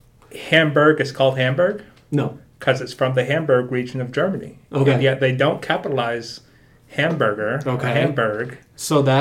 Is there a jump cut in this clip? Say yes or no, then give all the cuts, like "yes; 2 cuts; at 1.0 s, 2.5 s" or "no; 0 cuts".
no; 0 cuts